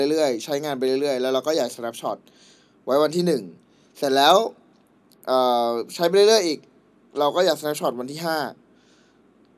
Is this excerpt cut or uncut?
uncut